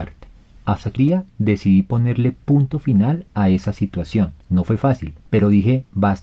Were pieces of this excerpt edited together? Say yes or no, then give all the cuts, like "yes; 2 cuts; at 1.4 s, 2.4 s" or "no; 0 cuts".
yes; 3 cuts; at 1.0 s, 4.4 s, 5.2 s